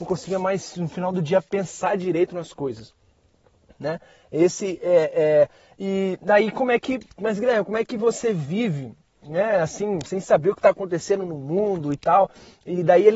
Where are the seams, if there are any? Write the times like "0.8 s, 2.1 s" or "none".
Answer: none